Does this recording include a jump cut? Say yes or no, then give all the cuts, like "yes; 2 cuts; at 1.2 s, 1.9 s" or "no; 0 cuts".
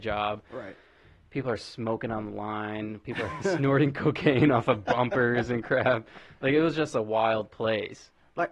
no; 0 cuts